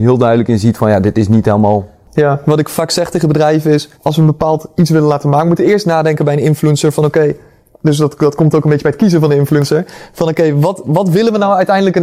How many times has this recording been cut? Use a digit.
1